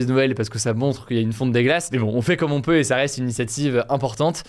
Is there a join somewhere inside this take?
no; 0 cuts

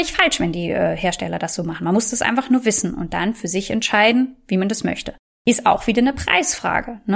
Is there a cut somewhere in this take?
no; 0 cuts

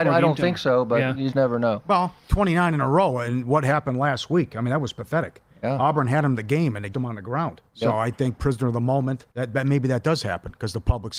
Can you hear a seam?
yes; 6 cuts; at 1.3 s, 2.2 s, 6.9 s, 7.7 s, 8.4 s, 9.3 s

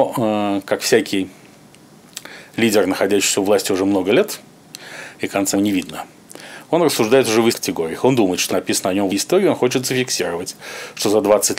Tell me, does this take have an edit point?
yes; 4 cuts; at 5.5 s, 7.5 s, 8.5 s, 9.1 s

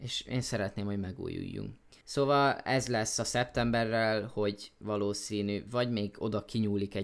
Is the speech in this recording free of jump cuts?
no; 1 cut; at 2.0 s

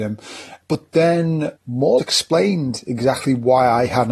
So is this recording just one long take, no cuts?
no; 2 cuts; at 1.6 s, 2.0 s

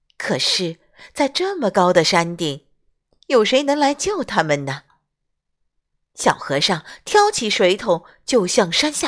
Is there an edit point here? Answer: no; 0 cuts

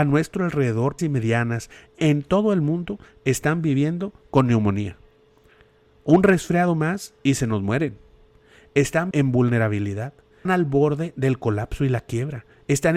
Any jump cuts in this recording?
yes; 3 cuts; at 1.0 s, 9.1 s, 10.5 s

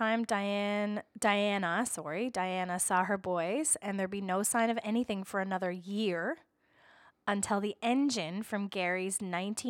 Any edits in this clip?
no; 0 cuts

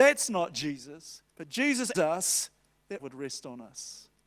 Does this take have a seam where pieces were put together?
yes; 3 cuts; at 1.3 s, 1.9 s, 3.0 s

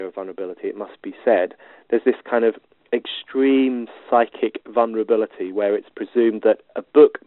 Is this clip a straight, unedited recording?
yes; 0 cuts

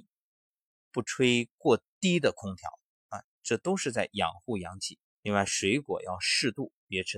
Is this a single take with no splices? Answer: no; 1 cut; at 5.0 s

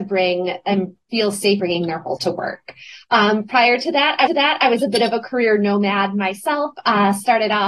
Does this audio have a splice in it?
yes; 4 cuts; at 1.0 s, 1.6 s, 2.2 s, 4.3 s

